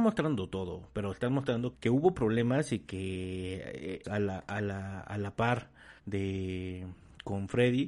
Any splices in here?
yes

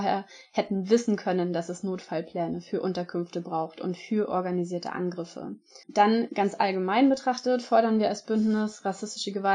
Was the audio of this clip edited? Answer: yes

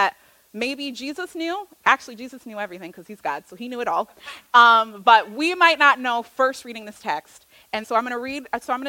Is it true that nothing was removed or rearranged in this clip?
no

